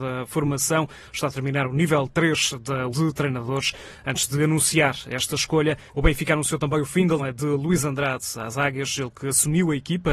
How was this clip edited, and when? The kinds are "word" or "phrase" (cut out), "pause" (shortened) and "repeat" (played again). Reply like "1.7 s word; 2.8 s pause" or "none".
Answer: 2.9 s phrase; 5.9 s pause; 7.2 s word